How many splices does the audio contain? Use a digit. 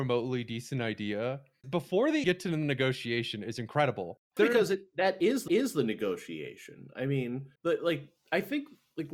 5